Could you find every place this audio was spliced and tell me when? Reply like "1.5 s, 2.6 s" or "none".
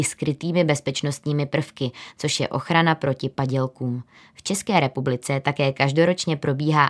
none